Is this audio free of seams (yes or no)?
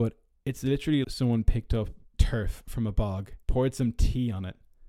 no